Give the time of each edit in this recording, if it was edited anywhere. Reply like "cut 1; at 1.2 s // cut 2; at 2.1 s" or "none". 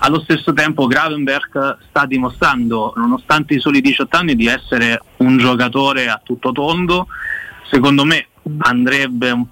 cut 1; at 3.0 s // cut 2; at 3.6 s // cut 3; at 5.1 s // cut 4; at 7.6 s